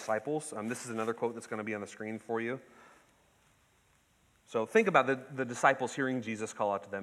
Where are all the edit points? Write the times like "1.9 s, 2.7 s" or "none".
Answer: none